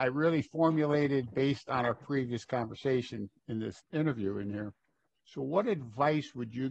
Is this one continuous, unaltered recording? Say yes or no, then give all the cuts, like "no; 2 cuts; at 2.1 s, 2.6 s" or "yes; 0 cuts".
yes; 0 cuts